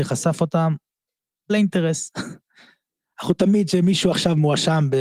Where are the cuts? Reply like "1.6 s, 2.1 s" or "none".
1.5 s